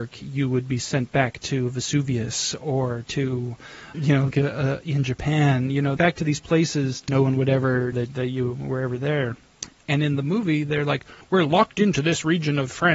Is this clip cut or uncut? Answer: cut